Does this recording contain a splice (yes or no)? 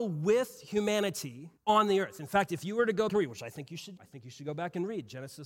yes